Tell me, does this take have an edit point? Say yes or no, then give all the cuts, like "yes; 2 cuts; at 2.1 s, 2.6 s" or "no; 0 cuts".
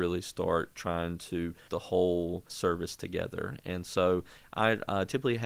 yes; 1 cut; at 1.7 s